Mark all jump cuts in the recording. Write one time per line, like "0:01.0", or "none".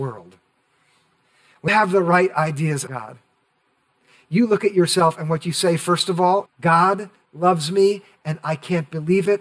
0:01.7
0:02.9
0:06.5